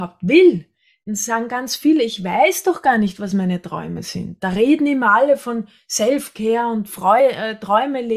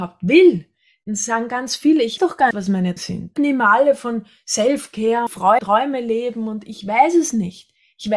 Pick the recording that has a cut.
second; 6 cuts; at 2.2 s, 2.5 s, 3.0 s, 3.4 s, 5.3 s, 5.6 s

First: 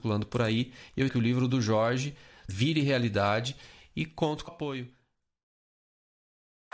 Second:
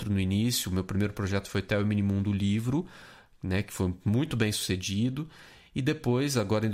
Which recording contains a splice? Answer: first; 3 cuts; at 1.1 s, 2.5 s, 4.5 s

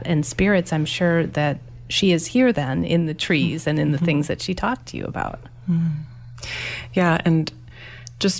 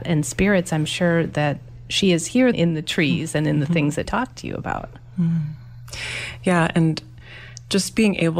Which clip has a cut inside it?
second; 2 cuts; at 2.5 s, 4.1 s

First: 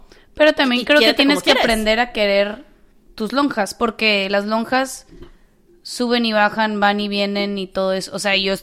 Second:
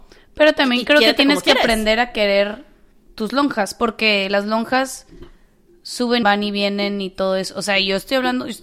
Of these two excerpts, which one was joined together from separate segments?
second; 1 cut; at 6.2 s

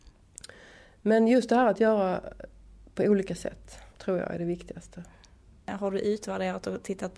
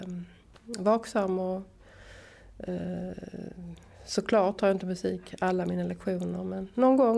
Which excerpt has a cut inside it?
first; 1 cut; at 3.9 s

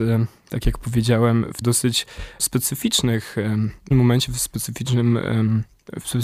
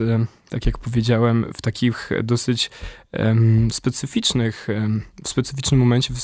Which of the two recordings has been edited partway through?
first; 3 cuts; at 1.6 s, 2.4 s, 3.9 s

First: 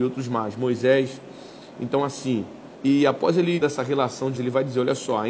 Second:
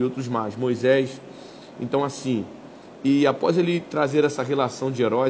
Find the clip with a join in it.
first; 3 cuts; at 2.7 s, 3.6 s, 4.4 s

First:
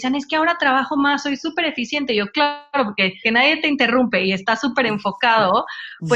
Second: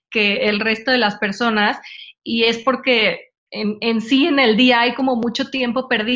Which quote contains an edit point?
first; 2 cuts; at 2.3 s, 3.2 s

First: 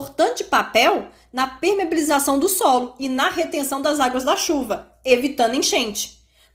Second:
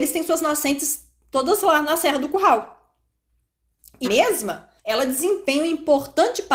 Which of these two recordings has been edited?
second; 2 cuts; at 4.0 s, 4.8 s

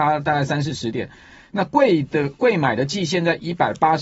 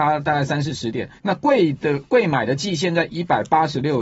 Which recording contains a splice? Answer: second; 1 cut; at 1.2 s

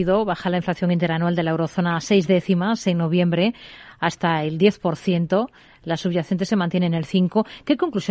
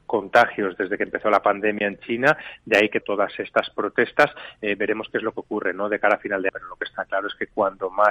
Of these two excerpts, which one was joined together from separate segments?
second; 2 cuts; at 3.0 s, 6.5 s

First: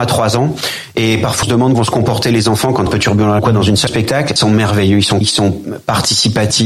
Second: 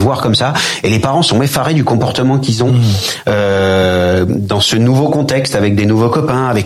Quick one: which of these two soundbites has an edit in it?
first; 7 cuts; at 1.4 s, 1.7 s, 2.9 s, 3.4 s, 3.9 s, 4.4 s, 5.2 s

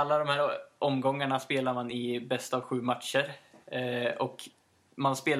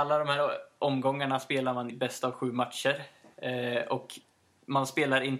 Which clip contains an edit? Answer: second; 1 cut; at 1.9 s

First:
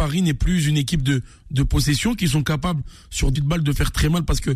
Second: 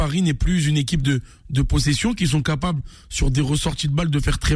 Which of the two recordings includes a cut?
first; 1 cut; at 3.4 s

